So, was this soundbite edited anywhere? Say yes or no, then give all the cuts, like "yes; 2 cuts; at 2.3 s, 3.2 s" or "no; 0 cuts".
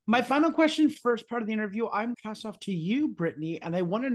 yes; 2 cuts; at 1.0 s, 2.1 s